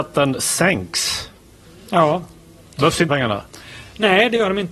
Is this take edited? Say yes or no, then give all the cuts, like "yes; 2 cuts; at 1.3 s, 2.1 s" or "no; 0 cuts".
yes; 1 cut; at 3.1 s